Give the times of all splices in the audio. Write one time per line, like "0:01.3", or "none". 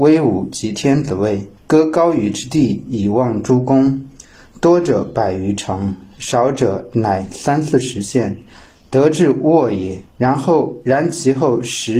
0:01.6
0:10.1